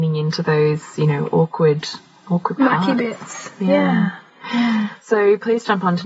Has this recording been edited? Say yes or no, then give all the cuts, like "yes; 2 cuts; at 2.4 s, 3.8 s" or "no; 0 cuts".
no; 0 cuts